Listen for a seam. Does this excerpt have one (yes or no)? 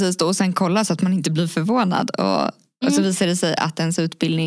no